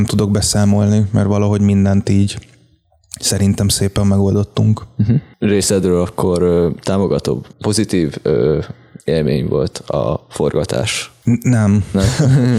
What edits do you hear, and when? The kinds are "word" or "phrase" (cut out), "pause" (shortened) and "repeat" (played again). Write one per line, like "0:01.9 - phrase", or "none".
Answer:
0:09.0 - pause